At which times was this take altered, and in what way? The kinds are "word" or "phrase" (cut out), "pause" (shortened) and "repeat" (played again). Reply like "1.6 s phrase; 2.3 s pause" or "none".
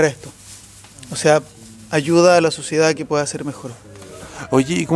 none